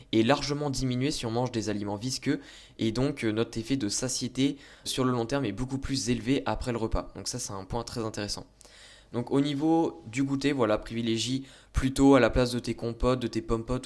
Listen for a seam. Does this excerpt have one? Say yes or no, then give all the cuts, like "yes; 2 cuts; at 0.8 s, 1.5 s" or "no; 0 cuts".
yes; 1 cut; at 4.9 s